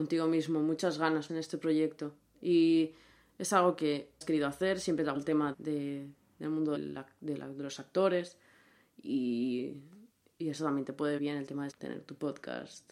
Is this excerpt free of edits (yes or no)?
no